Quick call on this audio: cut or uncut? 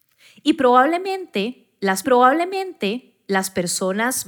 cut